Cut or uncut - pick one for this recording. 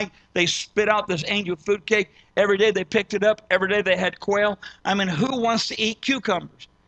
uncut